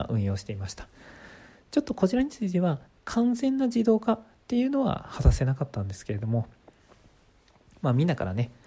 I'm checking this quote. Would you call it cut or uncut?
uncut